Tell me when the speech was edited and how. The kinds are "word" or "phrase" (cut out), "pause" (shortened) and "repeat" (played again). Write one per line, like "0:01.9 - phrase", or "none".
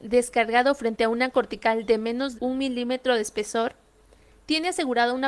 0:02.3 - word